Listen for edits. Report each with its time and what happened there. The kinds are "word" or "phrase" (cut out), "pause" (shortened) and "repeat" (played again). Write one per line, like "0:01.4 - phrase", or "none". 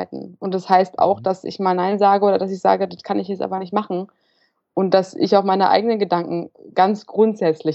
none